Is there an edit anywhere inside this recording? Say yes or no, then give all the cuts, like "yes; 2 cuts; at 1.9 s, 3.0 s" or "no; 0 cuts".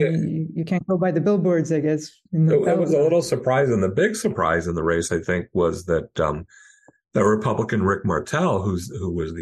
no; 0 cuts